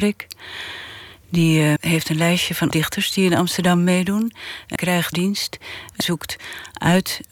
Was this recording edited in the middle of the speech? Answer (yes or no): yes